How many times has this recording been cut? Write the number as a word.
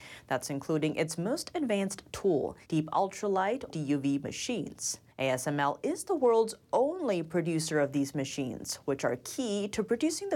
three